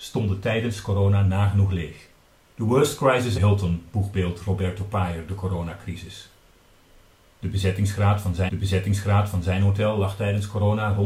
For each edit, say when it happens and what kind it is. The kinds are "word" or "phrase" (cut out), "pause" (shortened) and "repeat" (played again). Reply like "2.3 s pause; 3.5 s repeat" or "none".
2.4 s pause; 3.4 s phrase; 8.5 s repeat